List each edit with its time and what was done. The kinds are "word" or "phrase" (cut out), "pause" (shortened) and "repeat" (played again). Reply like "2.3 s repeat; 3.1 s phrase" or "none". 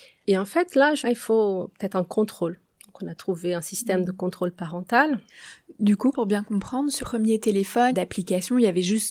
1.0 s phrase; 6.1 s word; 7.0 s word; 7.9 s phrase